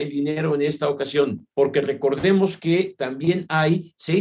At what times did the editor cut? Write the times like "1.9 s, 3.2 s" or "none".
1.5 s

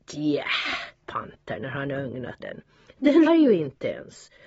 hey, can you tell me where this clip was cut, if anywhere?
1.0 s, 2.4 s, 3.3 s

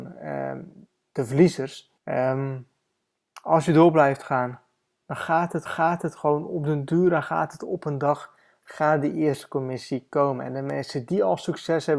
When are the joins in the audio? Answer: 2.0 s, 5.7 s

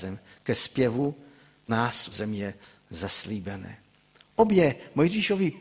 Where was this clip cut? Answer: 1.7 s, 2.1 s

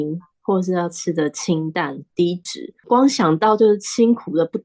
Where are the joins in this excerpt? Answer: 2.8 s

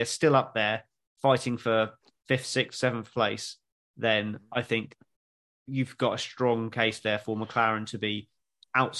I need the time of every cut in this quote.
none

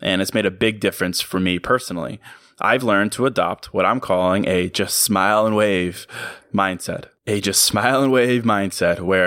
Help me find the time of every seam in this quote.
none

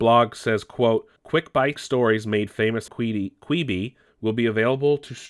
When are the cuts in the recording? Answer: 1.2 s, 1.8 s, 2.9 s, 4.1 s

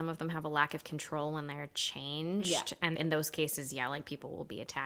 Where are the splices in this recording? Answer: 3.0 s

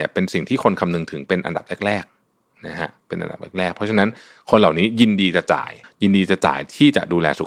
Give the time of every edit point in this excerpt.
5.8 s

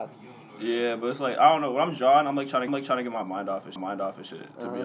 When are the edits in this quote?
2.7 s, 3.8 s

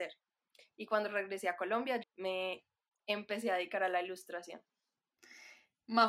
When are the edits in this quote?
2.0 s

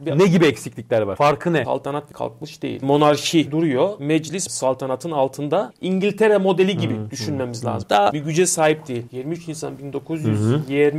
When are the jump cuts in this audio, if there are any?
2.1 s, 8.1 s

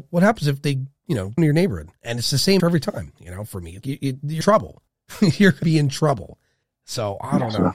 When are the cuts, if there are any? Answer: 1.4 s, 2.0 s, 2.6 s, 3.8 s, 4.4 s, 4.9 s, 5.6 s, 6.6 s

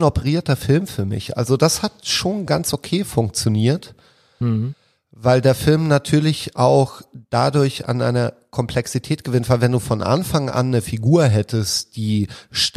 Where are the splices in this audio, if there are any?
none

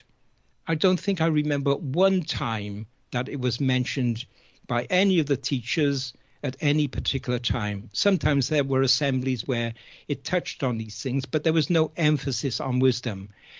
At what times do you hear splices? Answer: none

